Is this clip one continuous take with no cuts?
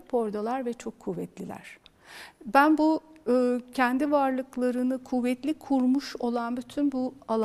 yes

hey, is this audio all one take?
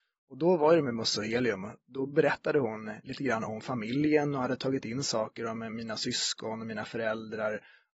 yes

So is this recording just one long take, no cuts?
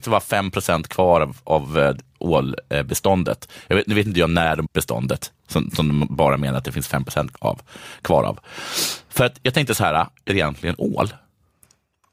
no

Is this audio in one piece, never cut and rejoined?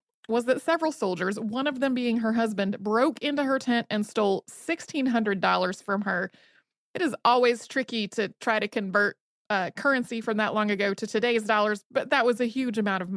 yes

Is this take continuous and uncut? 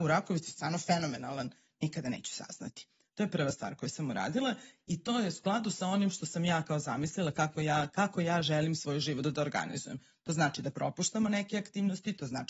yes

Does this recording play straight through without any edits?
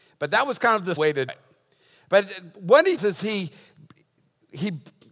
no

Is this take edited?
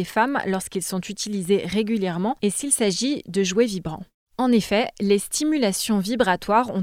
no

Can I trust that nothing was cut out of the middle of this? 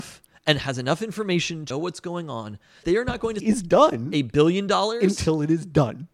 no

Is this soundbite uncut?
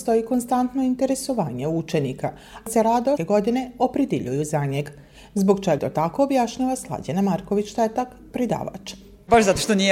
no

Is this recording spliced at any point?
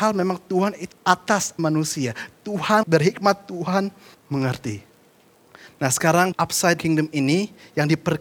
yes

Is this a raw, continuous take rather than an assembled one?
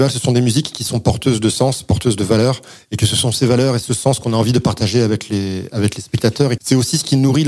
no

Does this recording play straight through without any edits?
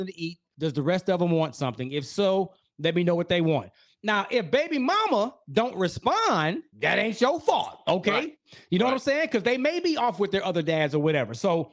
yes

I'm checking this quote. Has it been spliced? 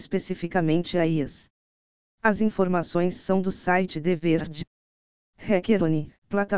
no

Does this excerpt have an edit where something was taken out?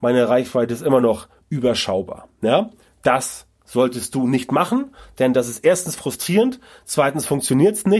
no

